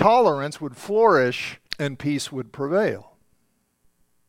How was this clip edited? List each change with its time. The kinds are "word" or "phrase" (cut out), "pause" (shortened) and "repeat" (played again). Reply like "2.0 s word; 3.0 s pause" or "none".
1.7 s pause